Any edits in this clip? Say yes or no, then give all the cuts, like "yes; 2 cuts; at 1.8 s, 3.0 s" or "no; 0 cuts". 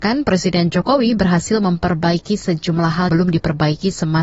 yes; 1 cut; at 3.1 s